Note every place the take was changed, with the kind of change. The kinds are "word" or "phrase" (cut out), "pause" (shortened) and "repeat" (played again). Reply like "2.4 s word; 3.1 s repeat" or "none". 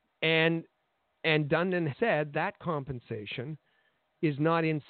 1.9 s word; 2.3 s word